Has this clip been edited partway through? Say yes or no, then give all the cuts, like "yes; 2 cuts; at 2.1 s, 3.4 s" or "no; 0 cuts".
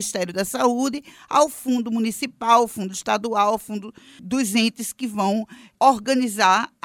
no; 0 cuts